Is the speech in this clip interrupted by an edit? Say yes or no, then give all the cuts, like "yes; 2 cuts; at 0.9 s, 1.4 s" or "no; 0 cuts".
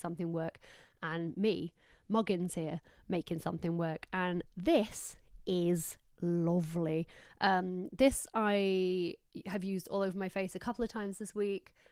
no; 0 cuts